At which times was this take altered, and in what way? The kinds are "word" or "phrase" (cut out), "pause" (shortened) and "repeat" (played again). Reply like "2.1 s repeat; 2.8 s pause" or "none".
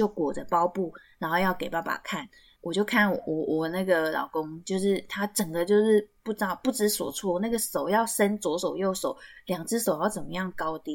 none